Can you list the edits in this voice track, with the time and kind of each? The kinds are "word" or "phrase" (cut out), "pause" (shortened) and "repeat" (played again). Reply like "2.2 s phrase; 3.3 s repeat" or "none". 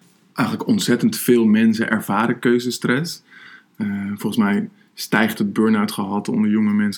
none